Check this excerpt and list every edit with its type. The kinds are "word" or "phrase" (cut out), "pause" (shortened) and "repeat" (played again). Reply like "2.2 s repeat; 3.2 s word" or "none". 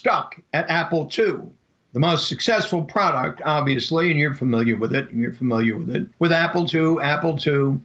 1.6 s pause; 6.1 s pause